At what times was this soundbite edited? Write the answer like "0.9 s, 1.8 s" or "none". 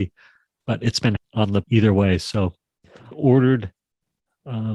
1.2 s, 1.6 s, 3.1 s

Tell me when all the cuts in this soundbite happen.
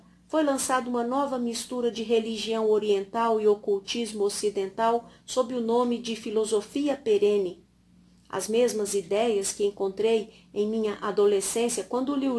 none

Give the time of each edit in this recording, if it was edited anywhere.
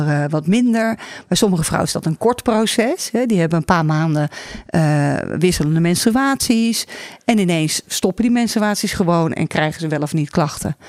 none

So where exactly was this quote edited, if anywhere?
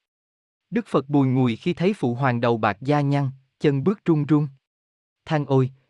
none

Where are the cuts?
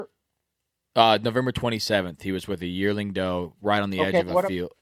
none

